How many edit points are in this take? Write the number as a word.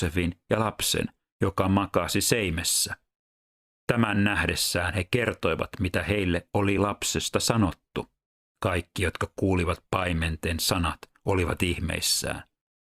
zero